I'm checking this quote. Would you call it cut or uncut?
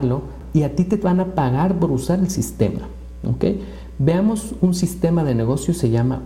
uncut